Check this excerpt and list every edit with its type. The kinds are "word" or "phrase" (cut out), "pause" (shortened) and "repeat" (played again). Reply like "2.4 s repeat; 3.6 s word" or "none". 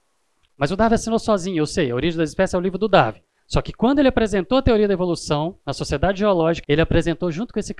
3.4 s pause; 5.6 s pause; 6.6 s phrase